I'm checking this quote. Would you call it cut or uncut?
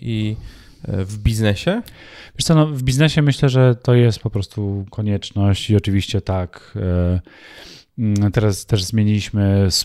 uncut